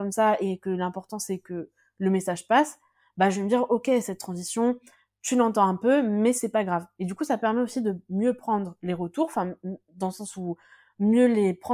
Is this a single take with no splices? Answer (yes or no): yes